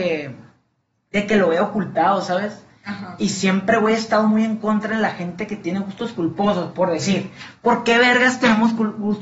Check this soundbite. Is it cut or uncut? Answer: uncut